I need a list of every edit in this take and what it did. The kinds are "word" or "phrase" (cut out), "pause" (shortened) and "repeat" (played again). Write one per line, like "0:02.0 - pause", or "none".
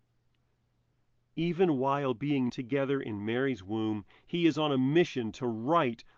0:02.5 - word